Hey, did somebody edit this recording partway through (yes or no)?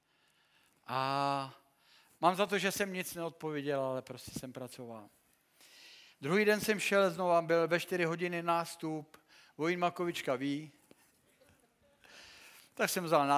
no